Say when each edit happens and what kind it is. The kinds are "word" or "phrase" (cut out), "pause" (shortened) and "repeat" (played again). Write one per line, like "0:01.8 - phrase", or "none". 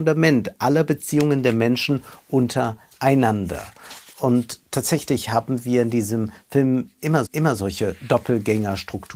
0:07.3 - repeat